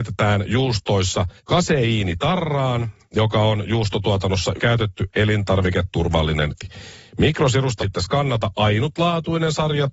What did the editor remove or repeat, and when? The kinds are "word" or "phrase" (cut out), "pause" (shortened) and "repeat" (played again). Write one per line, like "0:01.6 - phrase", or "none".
0:01.4 - pause
0:04.6 - word
0:06.5 - word
0:07.8 - word